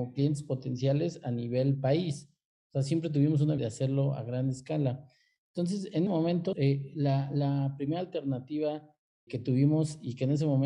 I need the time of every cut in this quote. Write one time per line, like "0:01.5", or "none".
0:03.6
0:06.1
0:06.5
0:09.3